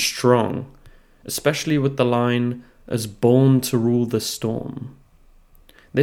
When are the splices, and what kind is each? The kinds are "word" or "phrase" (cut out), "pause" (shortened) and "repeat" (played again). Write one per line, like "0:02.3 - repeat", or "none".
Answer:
none